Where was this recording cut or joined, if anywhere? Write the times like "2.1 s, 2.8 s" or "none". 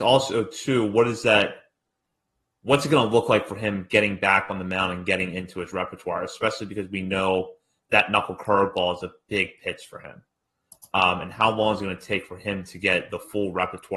none